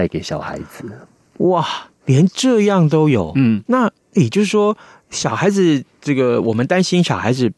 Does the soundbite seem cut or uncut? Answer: uncut